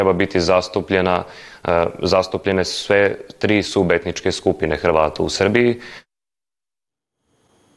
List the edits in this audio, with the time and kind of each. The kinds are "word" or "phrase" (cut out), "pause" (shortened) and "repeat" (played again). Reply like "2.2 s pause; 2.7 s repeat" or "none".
none